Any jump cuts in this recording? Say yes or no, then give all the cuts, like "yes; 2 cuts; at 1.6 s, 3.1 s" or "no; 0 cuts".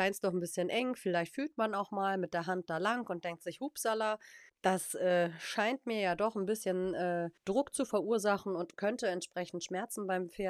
yes; 2 cuts; at 4.5 s, 7.4 s